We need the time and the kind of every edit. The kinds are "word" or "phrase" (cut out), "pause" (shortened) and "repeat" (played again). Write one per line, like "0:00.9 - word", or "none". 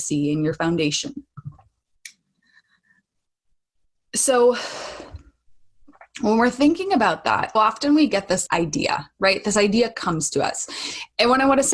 0:06.1 - pause
0:07.6 - word
0:08.5 - word